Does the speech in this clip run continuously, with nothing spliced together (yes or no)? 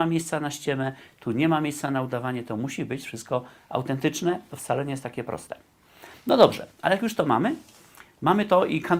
yes